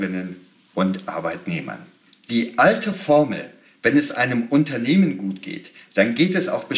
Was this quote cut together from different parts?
no; 0 cuts

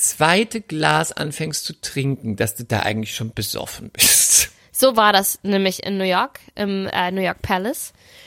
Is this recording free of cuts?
yes; 0 cuts

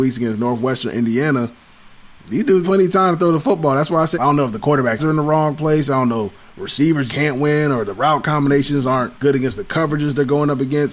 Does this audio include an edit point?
yes; 5 cuts; at 2.6 s, 4.1 s, 5.0 s, 7.1 s, 9.2 s

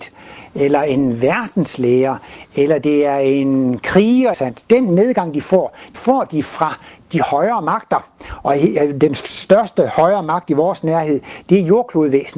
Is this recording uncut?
no; 2 cuts; at 4.3 s, 5.9 s

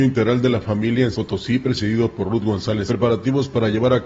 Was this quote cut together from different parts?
yes; 2 cuts; at 1.1 s, 2.9 s

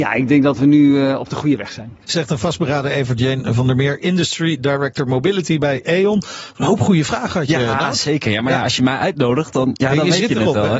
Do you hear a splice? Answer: yes; 1 cut; at 2.0 s

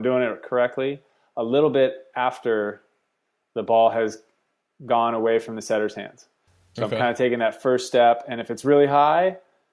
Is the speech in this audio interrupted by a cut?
no; 0 cuts

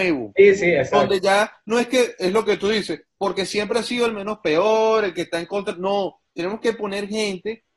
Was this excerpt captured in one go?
yes; 0 cuts

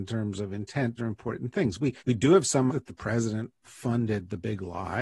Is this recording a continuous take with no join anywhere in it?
no; 4 cuts; at 1.0 s, 2.0 s, 2.7 s, 3.6 s

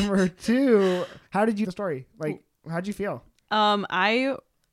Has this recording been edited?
yes; 2 cuts; at 1.3 s, 1.6 s

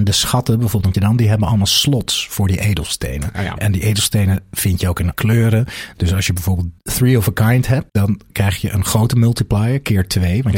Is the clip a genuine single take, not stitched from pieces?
no; 4 cuts; at 0.9 s, 5.1 s, 6.8 s, 7.9 s

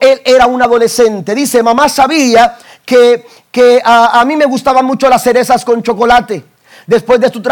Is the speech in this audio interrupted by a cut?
no; 0 cuts

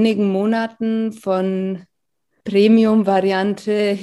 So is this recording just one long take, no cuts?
no; 1 cut; at 2.4 s

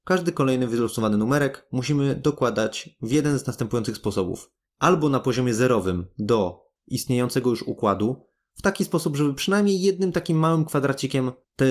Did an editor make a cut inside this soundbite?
no; 0 cuts

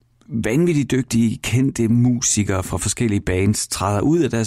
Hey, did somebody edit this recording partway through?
no; 0 cuts

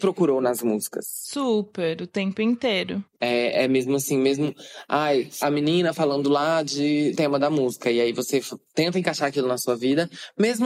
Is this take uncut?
no; 2 cuts; at 5.4 s, 7.1 s

